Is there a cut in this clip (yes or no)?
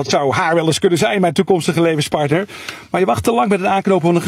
no